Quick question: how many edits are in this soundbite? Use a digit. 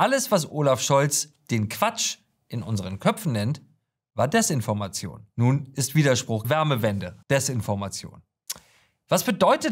3